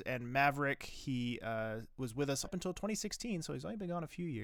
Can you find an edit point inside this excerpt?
yes; 1 cut; at 2.4 s

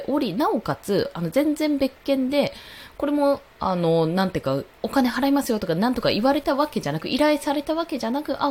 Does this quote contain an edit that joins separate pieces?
yes; 1 cut; at 3.5 s

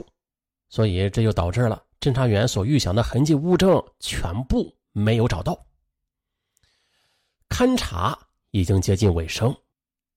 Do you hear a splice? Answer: no; 0 cuts

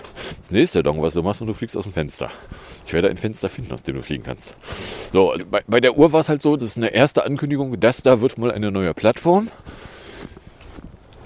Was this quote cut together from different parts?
yes; 2 cuts; at 5.4 s, 6.6 s

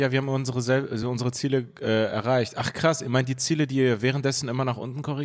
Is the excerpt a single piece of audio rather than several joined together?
yes; 0 cuts

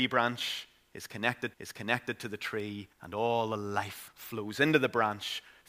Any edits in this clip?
yes; 3 cuts; at 1.5 s, 2.9 s, 4.1 s

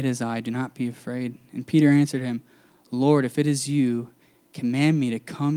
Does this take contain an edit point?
no; 0 cuts

